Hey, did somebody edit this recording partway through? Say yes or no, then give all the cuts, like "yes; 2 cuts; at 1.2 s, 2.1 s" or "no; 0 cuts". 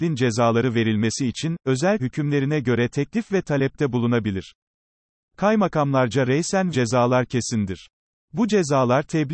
yes; 2 cuts; at 2.0 s, 6.7 s